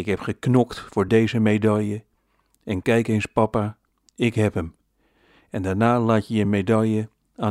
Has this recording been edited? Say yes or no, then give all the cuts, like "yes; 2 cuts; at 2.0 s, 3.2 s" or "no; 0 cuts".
no; 0 cuts